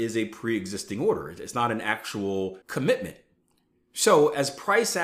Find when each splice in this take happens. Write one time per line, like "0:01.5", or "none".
0:02.6